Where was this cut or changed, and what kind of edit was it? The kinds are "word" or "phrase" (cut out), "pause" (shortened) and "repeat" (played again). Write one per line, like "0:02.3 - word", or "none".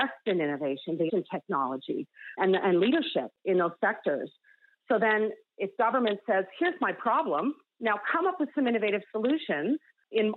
0:01.1 - word
0:02.4 - word